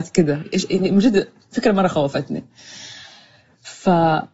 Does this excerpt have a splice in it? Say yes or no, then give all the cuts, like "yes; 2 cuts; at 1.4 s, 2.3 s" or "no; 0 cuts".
no; 0 cuts